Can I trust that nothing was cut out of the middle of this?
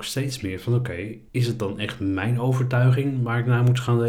no; 1 cut; at 1.3 s

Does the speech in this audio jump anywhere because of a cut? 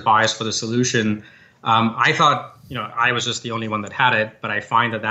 no; 0 cuts

